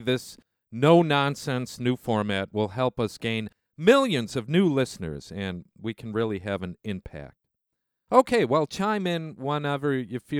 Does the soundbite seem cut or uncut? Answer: uncut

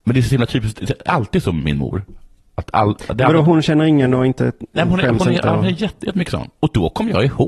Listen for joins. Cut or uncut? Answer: uncut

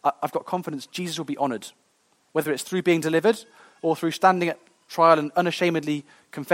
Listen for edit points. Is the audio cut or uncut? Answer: uncut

